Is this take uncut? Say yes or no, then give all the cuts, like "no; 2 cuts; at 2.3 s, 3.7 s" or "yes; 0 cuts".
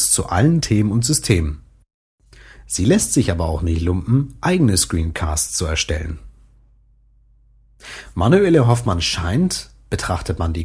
yes; 0 cuts